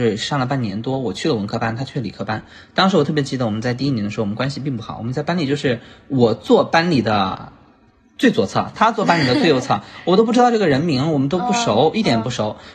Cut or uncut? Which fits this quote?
uncut